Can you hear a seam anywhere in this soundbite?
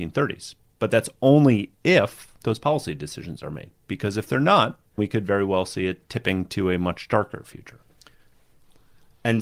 yes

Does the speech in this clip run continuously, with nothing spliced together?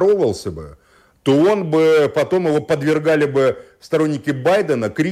yes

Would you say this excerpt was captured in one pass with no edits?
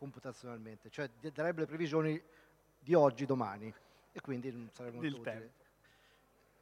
yes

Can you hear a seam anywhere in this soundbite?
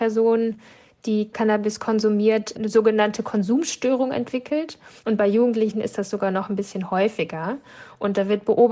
yes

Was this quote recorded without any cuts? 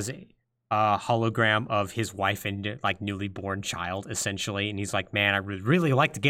yes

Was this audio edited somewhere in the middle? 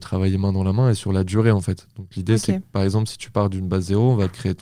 no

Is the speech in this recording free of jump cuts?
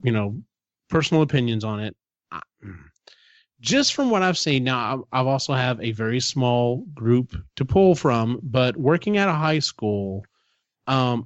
yes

